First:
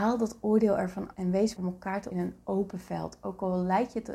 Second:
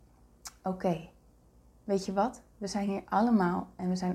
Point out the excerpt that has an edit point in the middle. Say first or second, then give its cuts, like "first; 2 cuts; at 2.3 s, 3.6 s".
first; 3 cuts; at 1.1 s, 1.6 s, 2.1 s